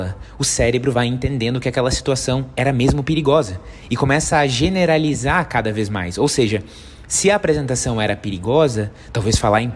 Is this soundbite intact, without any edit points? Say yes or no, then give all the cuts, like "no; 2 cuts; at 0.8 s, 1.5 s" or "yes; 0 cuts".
yes; 0 cuts